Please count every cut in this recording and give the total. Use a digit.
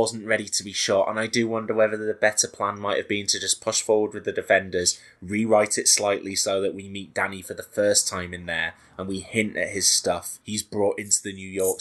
1